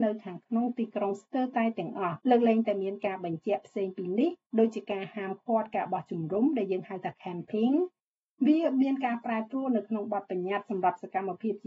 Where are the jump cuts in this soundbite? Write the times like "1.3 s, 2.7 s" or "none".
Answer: 2.2 s